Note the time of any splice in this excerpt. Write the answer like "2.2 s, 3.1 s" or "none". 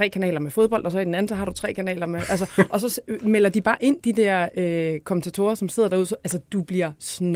none